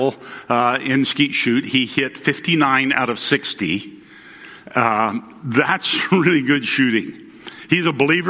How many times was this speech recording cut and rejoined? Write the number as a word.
zero